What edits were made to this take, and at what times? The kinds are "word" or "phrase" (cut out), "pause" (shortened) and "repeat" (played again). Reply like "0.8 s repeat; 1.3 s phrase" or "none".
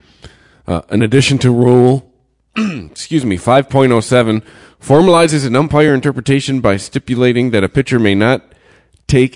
none